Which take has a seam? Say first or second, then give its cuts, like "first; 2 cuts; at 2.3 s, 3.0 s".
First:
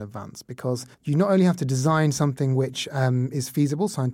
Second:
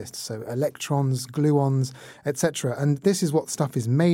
first; 1 cut; at 0.9 s